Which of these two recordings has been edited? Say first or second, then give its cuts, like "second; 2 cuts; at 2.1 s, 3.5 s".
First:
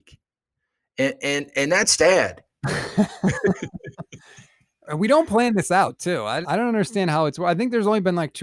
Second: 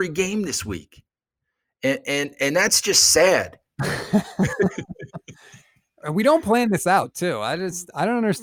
first; 2 cuts; at 2.0 s, 6.4 s